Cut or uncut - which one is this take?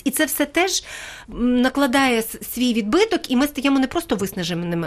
uncut